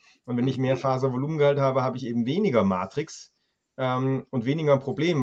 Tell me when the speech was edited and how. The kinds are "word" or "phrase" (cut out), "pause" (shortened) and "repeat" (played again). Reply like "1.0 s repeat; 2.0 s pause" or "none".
none